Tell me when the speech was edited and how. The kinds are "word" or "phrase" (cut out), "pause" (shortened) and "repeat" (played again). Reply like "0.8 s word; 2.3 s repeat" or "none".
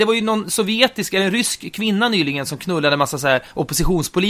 none